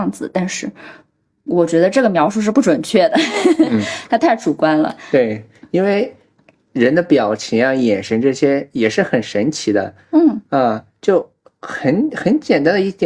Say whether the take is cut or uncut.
uncut